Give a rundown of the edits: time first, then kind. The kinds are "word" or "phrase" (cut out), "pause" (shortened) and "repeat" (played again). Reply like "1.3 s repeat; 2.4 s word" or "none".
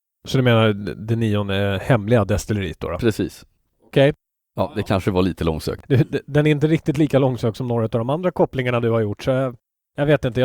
none